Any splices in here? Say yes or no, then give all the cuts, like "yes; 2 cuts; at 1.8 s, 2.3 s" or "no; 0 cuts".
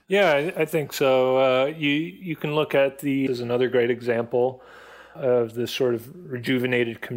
yes; 1 cut; at 3.3 s